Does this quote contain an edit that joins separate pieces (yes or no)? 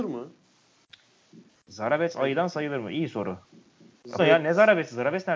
yes